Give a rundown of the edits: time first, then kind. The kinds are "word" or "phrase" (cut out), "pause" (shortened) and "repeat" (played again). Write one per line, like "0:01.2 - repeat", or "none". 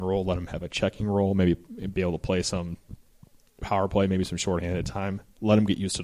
none